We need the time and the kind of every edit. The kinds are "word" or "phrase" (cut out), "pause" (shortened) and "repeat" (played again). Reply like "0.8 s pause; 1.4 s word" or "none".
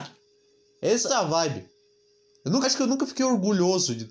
1.1 s word; 2.6 s word